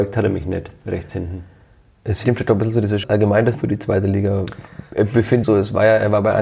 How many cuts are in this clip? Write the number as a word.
four